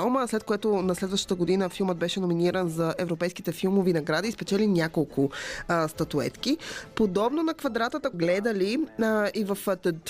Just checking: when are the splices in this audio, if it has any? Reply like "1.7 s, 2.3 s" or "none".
8.1 s